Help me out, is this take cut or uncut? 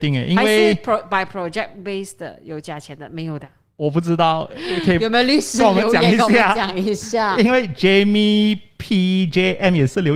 uncut